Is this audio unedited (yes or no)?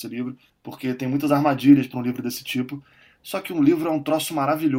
yes